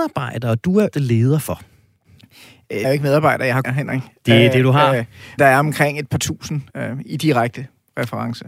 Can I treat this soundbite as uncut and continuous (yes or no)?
no